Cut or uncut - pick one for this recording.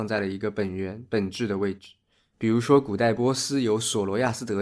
uncut